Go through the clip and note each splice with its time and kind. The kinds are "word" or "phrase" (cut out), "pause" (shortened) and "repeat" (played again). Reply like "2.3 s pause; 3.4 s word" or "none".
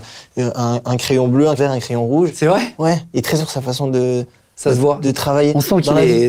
1.6 s word; 3.4 s word